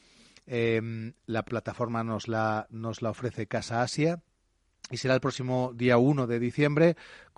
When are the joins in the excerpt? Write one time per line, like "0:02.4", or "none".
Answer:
0:01.5